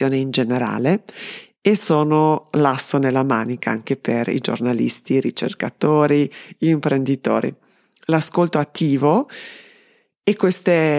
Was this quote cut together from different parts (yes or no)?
no